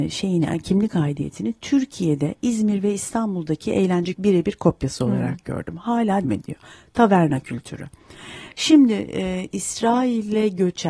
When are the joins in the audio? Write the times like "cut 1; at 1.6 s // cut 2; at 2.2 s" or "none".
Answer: cut 1; at 4.1 s // cut 2; at 6.2 s